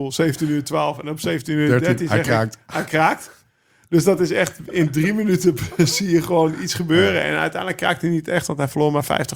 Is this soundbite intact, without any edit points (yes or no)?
yes